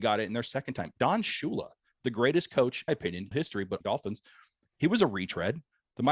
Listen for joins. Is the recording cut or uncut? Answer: cut